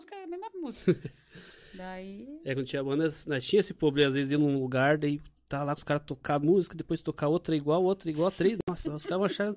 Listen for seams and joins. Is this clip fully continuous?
no; 1 cut; at 5.8 s

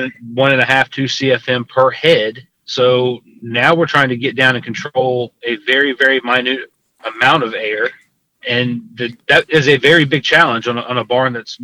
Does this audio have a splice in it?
no; 0 cuts

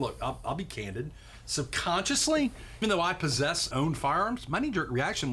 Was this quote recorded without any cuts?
no; 2 cuts; at 2.8 s, 3.7 s

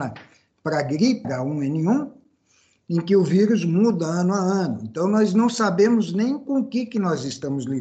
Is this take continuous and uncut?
no; 1 cut; at 1.2 s

